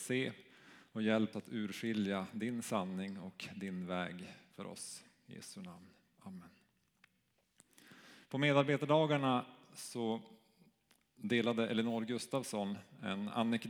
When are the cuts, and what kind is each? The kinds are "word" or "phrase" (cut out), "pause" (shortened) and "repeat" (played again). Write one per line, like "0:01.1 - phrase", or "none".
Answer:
0:01.3 - word